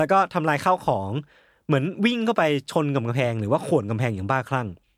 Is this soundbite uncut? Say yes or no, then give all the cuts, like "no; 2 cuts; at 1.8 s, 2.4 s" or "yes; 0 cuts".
yes; 0 cuts